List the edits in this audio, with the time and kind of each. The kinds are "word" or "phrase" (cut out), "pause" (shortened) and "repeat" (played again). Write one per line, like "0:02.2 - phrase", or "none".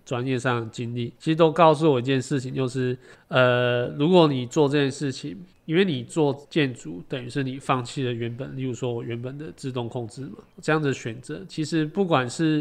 0:01.2 - pause
0:03.1 - pause
0:05.5 - pause
0:06.4 - pause
0:10.5 - pause